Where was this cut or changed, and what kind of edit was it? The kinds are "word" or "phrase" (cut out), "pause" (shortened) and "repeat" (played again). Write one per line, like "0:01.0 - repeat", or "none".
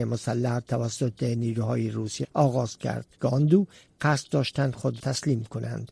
0:02.2 - word
0:03.1 - pause
0:05.0 - word